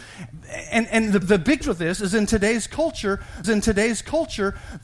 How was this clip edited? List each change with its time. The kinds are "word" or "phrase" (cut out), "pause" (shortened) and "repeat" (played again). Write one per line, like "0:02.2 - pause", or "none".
0:01.2 - word
0:01.6 - word
0:03.4 - repeat